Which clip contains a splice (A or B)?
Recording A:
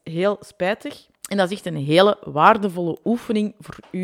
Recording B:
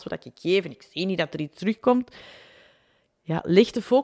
A